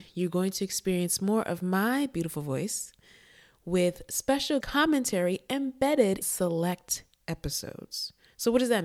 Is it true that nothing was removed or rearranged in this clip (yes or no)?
no